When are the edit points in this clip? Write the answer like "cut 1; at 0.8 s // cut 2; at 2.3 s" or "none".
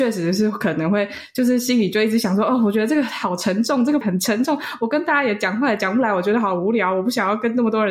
cut 1; at 4.0 s